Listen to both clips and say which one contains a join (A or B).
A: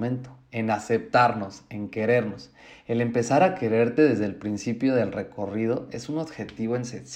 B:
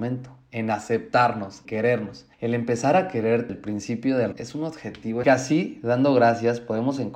B